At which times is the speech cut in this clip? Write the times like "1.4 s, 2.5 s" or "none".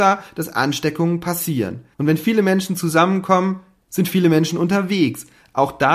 1.9 s